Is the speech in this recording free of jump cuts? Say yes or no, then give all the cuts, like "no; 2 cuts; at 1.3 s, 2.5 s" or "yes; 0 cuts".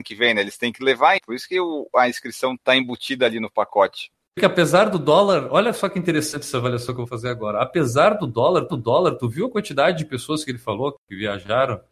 no; 3 cuts; at 1.2 s, 4.4 s, 8.7 s